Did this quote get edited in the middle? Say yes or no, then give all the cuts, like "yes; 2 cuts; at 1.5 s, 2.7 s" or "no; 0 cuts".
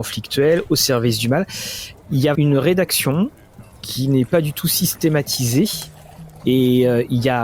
yes; 1 cut; at 2.3 s